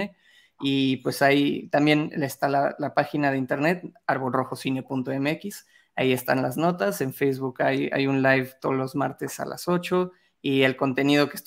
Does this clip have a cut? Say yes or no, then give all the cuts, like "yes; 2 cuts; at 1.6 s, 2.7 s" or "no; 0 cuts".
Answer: no; 0 cuts